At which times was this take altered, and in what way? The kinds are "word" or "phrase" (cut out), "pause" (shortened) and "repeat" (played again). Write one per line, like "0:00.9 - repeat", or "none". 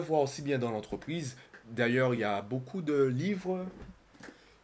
none